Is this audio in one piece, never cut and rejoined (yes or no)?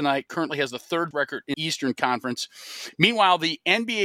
no